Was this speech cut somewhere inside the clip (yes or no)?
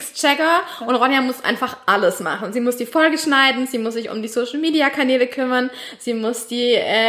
no